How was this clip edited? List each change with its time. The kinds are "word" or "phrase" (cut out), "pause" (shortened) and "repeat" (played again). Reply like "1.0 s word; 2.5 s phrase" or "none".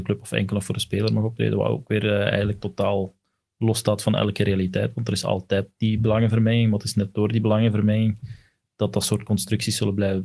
none